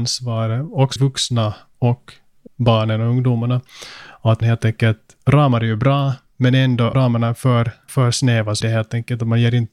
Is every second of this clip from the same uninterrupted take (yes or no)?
no